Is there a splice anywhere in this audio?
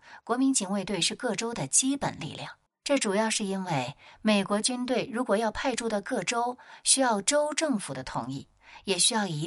yes; 1 cut; at 2.7 s

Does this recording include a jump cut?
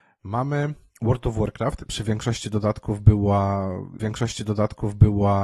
yes; 2 cuts; at 1.9 s, 4.0 s

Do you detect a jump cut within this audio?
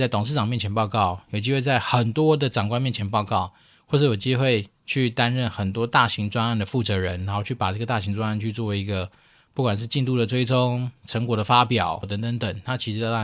yes; 1 cut; at 12.0 s

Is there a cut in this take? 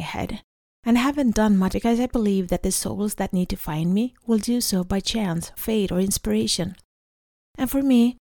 yes; 2 cuts; at 1.7 s, 5.6 s

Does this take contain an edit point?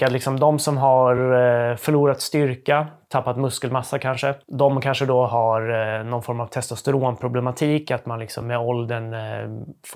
no; 0 cuts

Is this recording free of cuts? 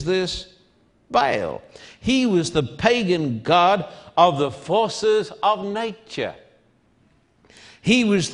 yes; 0 cuts

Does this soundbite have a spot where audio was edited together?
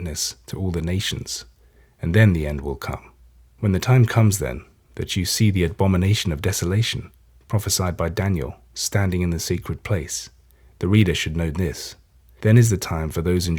no; 0 cuts

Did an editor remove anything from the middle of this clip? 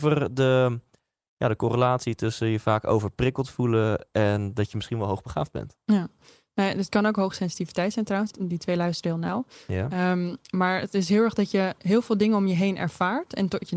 yes; 1 cut; at 8.3 s

